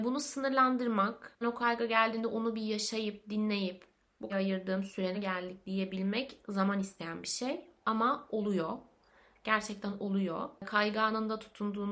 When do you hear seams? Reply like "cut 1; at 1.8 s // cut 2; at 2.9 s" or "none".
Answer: cut 1; at 1.4 s // cut 2; at 4.3 s // cut 3; at 5.1 s